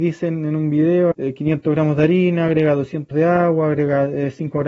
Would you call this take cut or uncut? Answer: cut